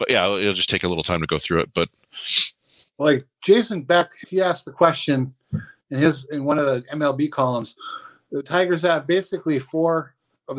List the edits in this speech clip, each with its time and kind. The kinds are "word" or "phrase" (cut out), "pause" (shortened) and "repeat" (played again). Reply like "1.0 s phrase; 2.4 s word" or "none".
4.2 s word

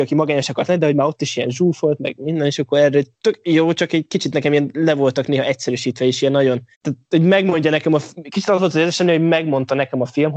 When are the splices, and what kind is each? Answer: 3.1 s pause; 6.7 s pause

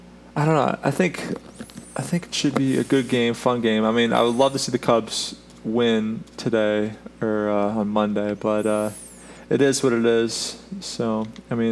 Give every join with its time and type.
none

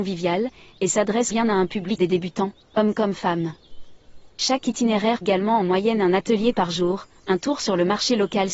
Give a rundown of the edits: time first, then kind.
1.3 s word; 2.0 s phrase; 5.2 s word

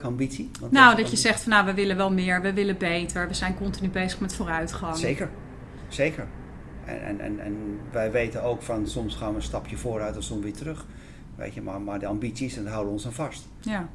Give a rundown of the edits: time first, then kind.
none

